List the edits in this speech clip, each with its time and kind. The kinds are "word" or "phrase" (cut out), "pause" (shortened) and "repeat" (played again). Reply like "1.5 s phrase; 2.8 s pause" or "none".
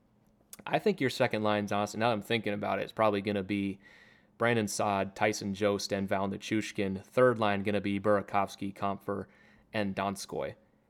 none